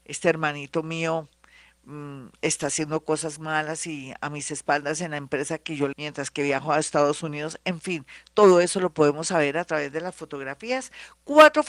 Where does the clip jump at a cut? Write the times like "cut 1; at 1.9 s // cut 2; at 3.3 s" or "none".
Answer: cut 1; at 5.9 s